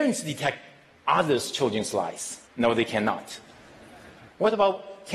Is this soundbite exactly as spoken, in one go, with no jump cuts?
no; 1 cut; at 2.5 s

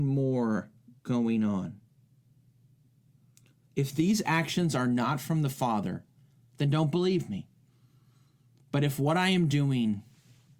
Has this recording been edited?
no; 0 cuts

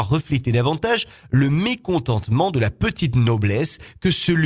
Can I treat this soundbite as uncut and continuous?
yes; 0 cuts

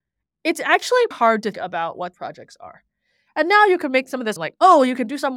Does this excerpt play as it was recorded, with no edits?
no; 4 cuts; at 1.1 s, 1.5 s, 2.1 s, 4.4 s

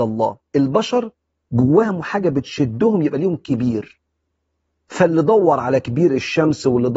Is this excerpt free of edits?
yes; 0 cuts

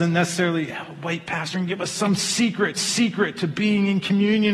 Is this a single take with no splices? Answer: no; 2 cuts; at 1.5 s, 2.7 s

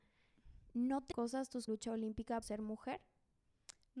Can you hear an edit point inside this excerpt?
yes; 3 cuts; at 1.1 s, 1.7 s, 2.4 s

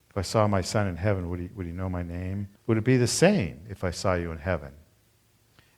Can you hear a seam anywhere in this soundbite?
yes; 1 cut; at 2.6 s

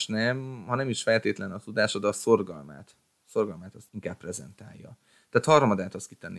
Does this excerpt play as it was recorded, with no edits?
no; 1 cut; at 3.9 s

